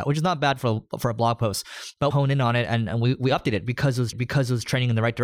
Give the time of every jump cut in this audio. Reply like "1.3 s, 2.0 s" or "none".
2.1 s, 4.1 s

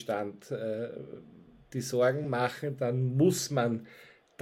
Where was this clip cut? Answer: none

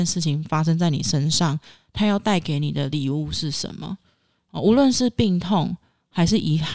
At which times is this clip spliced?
none

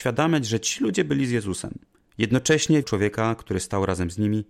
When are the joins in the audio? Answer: 2.8 s

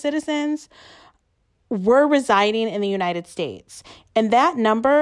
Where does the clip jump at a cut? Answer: none

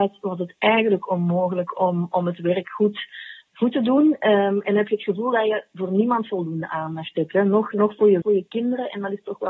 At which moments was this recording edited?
8.2 s

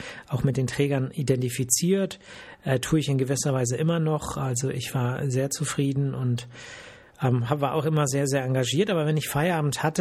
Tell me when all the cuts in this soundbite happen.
none

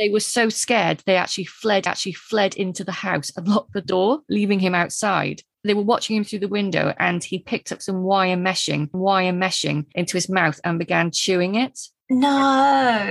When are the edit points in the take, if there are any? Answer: 1.9 s, 8.9 s

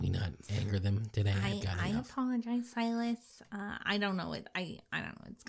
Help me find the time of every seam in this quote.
none

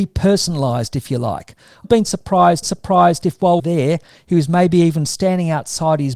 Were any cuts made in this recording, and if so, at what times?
1.8 s, 2.6 s, 3.6 s

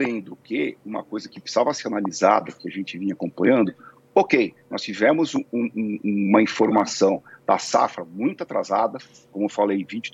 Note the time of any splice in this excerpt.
none

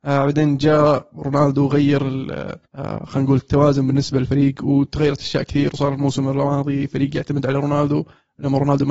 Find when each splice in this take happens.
2.7 s

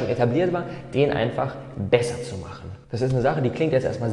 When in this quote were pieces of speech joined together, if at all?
2.8 s

